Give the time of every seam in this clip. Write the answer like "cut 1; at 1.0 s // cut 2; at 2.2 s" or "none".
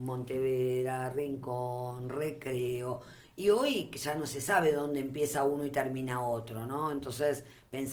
none